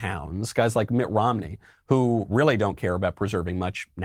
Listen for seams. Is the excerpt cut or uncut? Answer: uncut